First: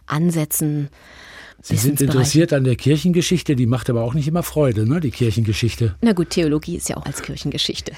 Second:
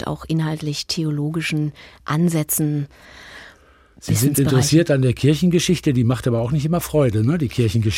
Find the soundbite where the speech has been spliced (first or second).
first